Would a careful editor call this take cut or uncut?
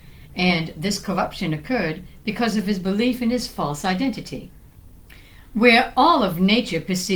uncut